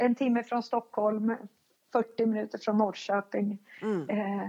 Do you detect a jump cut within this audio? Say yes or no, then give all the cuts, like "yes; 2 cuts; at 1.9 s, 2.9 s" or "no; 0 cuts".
no; 0 cuts